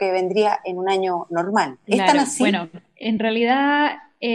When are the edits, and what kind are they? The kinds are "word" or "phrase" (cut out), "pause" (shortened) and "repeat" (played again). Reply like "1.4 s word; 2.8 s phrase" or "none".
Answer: none